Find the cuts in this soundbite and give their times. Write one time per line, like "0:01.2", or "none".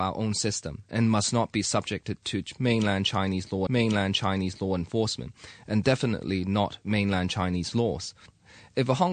0:03.7